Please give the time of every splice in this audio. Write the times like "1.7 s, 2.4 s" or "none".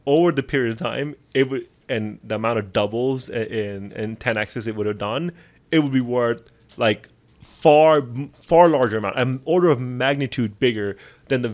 none